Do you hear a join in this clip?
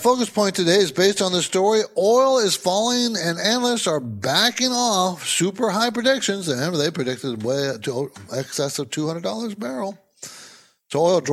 no; 0 cuts

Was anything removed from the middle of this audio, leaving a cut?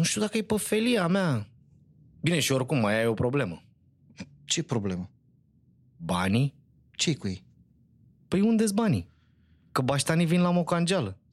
no; 0 cuts

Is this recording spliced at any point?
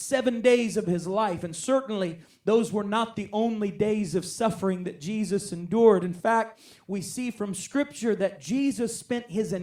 no; 0 cuts

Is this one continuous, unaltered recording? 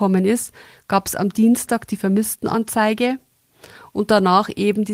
yes; 0 cuts

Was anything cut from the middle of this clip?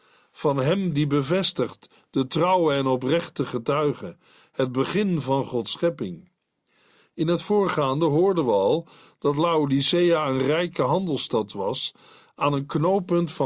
no; 0 cuts

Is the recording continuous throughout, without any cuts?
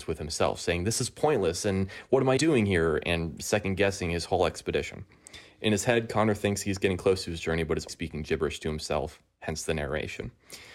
no; 2 cuts; at 2.4 s, 7.9 s

